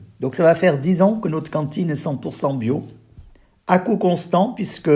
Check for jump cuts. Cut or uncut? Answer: uncut